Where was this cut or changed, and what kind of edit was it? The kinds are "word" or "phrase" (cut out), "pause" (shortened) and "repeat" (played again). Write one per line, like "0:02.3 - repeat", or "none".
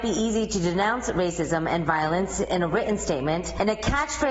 none